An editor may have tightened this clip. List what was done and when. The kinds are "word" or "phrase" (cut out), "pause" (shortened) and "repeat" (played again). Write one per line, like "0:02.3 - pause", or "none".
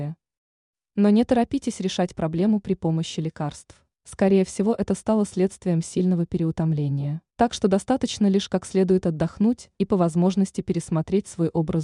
0:03.9 - pause
0:07.3 - pause
0:09.7 - pause